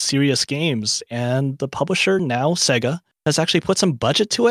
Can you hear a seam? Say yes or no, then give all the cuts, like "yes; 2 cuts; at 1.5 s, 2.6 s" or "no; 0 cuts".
no; 0 cuts